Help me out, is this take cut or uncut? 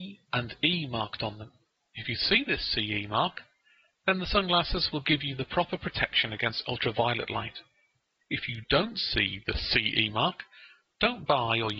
uncut